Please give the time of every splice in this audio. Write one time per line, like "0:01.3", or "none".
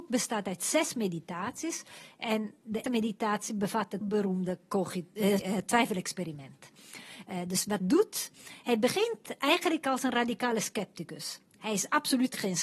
0:02.8
0:04.0
0:05.4
0:07.8